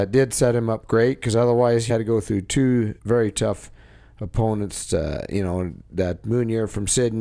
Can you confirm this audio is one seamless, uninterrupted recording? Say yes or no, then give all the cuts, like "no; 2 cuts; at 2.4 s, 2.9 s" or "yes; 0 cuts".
no; 2 cuts; at 1.9 s, 3.0 s